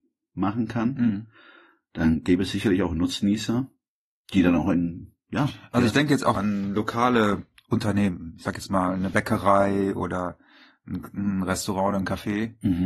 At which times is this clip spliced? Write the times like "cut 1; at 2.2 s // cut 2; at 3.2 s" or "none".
cut 1; at 6.3 s